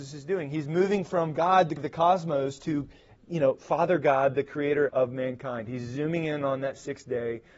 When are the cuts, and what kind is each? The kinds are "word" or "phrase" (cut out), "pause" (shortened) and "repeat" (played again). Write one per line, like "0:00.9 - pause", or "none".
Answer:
0:01.8 - word
0:04.9 - word